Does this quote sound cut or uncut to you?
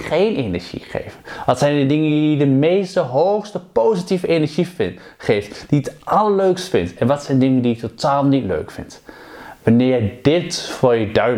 uncut